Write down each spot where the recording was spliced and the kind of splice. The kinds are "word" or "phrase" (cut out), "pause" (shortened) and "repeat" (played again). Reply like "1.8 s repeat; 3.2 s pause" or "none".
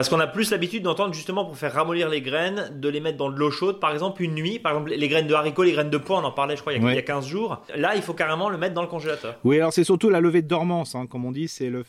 none